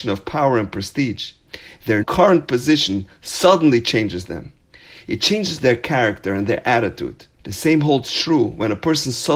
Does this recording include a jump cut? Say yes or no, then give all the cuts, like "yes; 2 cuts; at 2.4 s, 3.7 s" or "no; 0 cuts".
yes; 2 cuts; at 2.0 s, 7.3 s